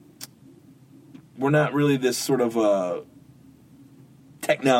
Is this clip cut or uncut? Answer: uncut